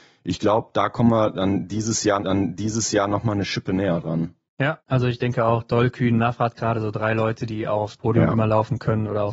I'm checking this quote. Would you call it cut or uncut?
cut